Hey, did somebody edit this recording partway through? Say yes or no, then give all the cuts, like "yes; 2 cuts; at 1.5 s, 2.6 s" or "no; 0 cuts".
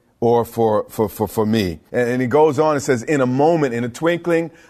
yes; 1 cut; at 1.9 s